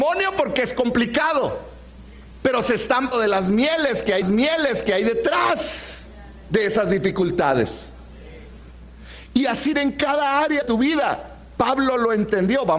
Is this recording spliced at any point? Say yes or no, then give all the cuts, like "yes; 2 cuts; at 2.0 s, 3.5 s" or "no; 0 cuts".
yes; 4 cuts; at 3.1 s, 4.2 s, 9.7 s, 10.6 s